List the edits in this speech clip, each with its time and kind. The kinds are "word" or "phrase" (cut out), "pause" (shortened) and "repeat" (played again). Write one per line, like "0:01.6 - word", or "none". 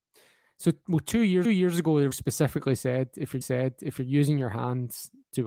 0:01.4 - repeat
0:02.1 - word
0:03.4 - repeat